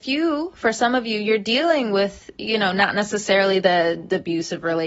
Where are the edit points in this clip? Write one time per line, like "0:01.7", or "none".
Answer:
none

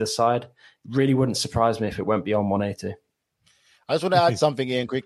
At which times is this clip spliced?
none

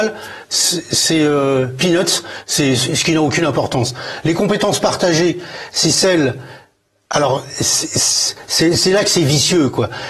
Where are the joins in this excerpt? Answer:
none

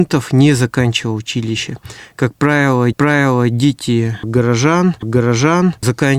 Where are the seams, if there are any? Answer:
0:02.9
0:05.0

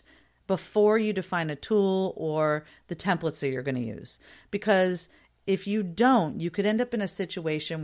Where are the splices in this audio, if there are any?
none

